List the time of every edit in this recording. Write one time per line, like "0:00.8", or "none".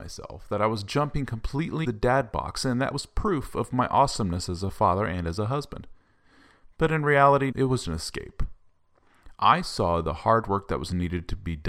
0:01.8
0:07.5
0:07.8